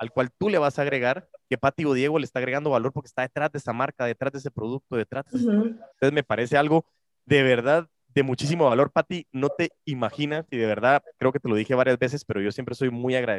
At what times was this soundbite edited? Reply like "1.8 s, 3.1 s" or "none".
5.9 s